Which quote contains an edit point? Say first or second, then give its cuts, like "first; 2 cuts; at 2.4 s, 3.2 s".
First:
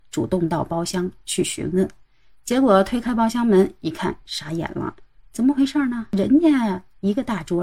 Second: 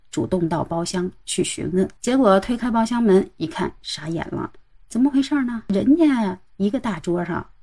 second; 1 cut; at 2.0 s